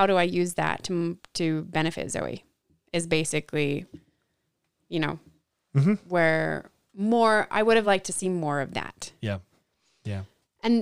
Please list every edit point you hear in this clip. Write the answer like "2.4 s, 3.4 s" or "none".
none